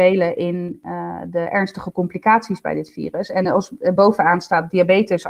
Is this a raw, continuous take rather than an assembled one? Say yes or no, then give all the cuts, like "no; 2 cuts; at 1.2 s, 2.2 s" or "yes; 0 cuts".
yes; 0 cuts